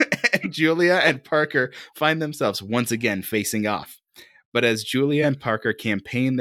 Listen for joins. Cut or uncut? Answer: uncut